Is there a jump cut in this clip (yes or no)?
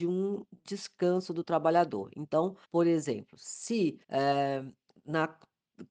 yes